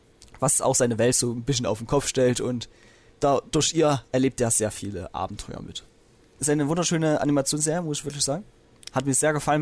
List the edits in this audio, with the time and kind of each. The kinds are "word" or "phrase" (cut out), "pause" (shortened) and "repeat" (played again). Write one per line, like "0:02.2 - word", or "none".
none

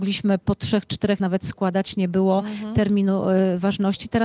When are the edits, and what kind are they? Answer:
0:01.2 - word

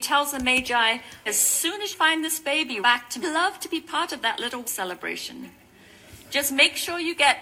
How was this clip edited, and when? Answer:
0:01.3 - word
0:01.9 - word
0:02.8 - word
0:03.2 - phrase
0:04.6 - word

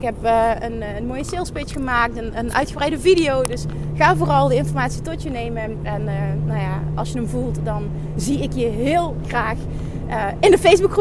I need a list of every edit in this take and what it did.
none

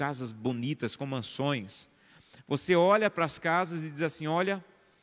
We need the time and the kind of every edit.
none

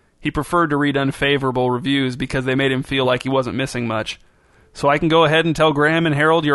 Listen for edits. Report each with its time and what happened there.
none

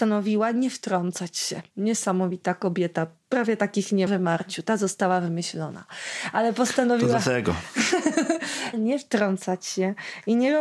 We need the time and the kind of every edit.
0:01.7 - pause
0:04.1 - phrase
0:08.7 - word

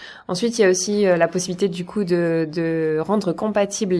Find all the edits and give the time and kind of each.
none

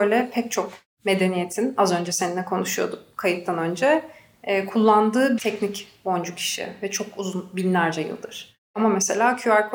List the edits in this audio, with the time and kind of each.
0:05.4 - word

